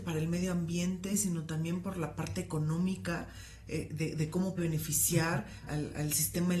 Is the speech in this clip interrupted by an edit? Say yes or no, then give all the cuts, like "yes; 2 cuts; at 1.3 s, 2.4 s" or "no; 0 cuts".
yes; 2 cuts; at 4.6 s, 5.7 s